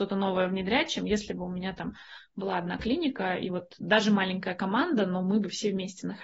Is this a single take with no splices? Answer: yes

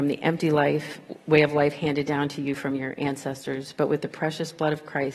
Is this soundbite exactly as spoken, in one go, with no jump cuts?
yes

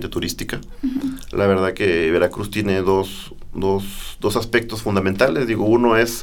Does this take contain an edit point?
no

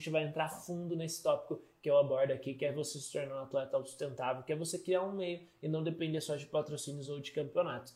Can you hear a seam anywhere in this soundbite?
no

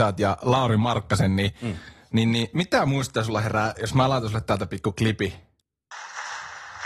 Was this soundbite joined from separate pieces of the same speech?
no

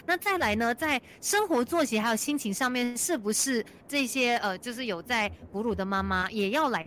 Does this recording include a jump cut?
no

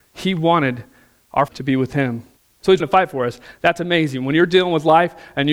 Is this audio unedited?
no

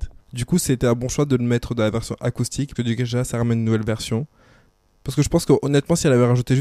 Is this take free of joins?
no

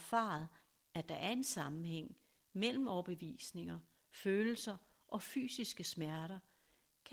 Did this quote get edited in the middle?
no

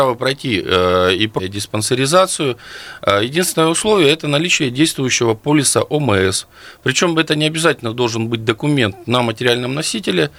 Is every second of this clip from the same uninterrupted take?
no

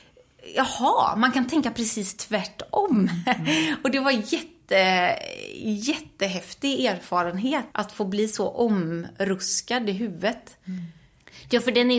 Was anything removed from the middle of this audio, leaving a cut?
yes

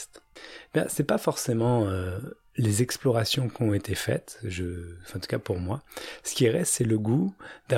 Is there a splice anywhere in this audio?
no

